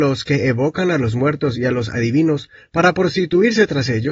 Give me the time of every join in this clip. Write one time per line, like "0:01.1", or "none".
none